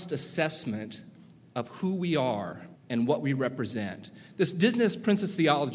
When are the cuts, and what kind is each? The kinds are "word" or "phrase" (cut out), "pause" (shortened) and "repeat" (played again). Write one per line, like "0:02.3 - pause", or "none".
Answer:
0:02.8 - pause